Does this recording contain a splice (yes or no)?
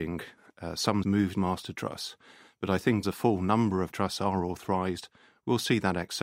yes